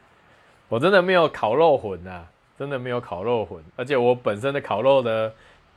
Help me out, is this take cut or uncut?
uncut